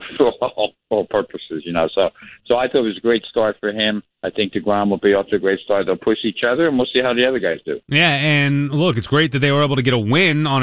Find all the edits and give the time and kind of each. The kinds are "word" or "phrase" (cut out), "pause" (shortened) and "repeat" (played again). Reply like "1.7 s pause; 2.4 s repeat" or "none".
4.1 s pause